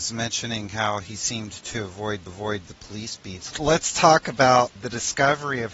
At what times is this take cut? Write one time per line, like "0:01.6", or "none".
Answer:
0:02.3
0:04.8